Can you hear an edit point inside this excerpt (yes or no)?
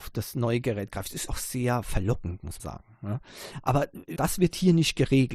yes